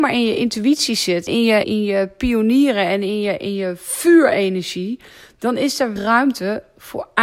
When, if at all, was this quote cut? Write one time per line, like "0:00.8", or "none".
0:01.3
0:01.6
0:06.0